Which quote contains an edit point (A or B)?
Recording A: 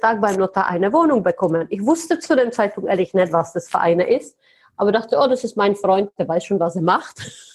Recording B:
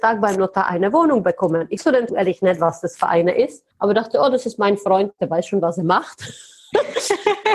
B